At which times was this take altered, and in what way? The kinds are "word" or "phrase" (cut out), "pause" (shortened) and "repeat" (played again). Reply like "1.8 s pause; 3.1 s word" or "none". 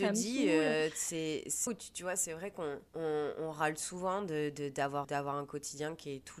1.7 s word; 2.9 s pause; 5.0 s word

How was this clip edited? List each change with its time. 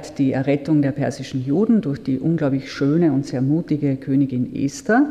none

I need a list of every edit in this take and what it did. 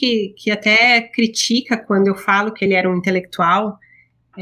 none

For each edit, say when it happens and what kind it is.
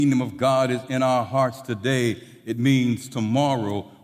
none

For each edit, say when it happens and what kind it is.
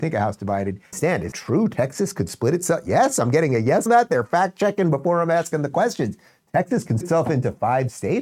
0.9 s word; 1.3 s word; 3.9 s word; 7.0 s word

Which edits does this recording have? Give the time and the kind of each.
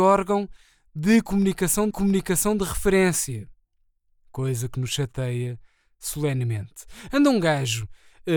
1.9 s repeat

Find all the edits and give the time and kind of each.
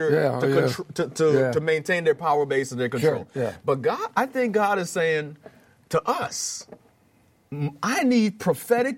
none

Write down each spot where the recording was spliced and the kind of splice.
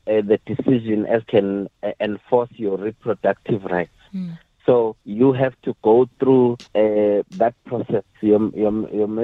1.2 s phrase; 5.0 s pause; 6.7 s pause

